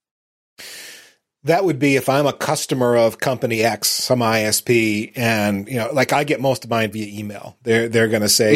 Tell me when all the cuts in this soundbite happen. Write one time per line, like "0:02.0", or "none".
none